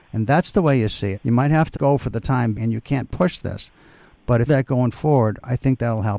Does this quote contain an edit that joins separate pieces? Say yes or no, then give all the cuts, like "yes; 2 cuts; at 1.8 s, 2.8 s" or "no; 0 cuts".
yes; 4 cuts; at 1.1 s, 1.7 s, 2.5 s, 4.5 s